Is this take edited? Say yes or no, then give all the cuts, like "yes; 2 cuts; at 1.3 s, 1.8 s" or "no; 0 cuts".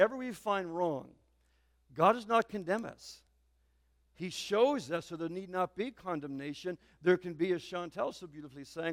no; 0 cuts